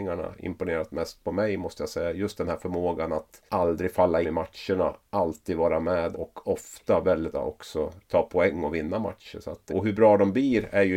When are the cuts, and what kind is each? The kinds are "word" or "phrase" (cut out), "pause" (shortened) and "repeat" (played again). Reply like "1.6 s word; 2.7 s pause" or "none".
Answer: 3.5 s pause; 4.2 s word; 6.1 s word; 7.3 s word; 8.0 s pause; 9.7 s word

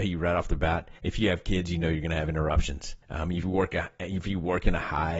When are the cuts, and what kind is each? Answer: 1.0 s pause; 3.0 s pause; 3.4 s word

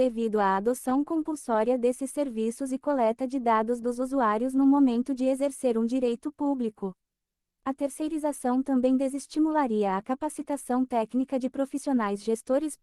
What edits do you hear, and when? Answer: none

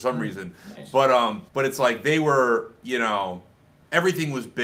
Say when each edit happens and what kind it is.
1.5 s pause

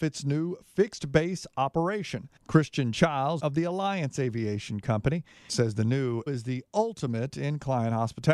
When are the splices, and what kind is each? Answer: 2.4 s pause; 3.4 s phrase; 5.5 s phrase; 6.3 s word

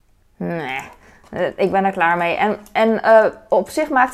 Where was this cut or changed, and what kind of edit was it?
none

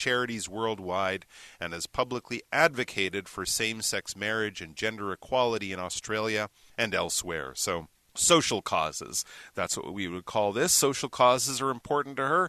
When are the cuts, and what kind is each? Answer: none

